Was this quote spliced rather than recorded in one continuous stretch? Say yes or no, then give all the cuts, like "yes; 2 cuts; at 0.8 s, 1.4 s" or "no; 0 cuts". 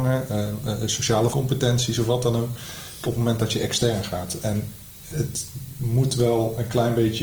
yes; 3 cuts; at 1.3 s, 3.0 s, 5.1 s